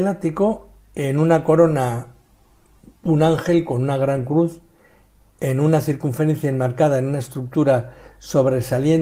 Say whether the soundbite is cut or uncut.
uncut